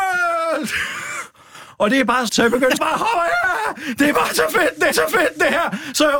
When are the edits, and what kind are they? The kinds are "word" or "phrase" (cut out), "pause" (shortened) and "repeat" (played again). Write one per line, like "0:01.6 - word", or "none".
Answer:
0:02.3 - phrase
0:02.8 - word
0:04.9 - repeat